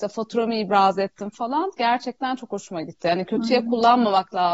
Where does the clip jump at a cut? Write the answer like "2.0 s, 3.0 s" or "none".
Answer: none